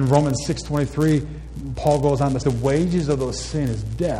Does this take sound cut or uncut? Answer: cut